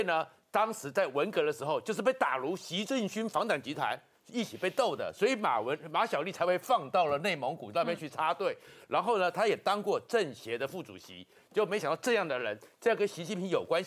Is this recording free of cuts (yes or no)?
yes